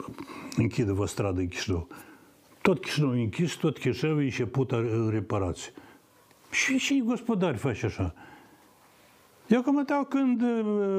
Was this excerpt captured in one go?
yes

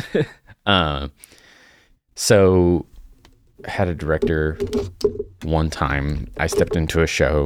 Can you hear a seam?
yes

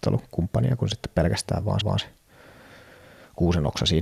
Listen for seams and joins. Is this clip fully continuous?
no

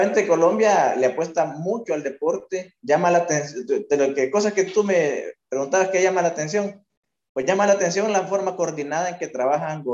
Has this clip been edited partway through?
no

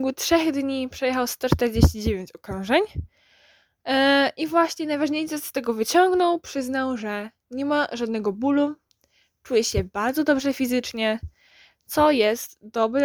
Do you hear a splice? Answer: no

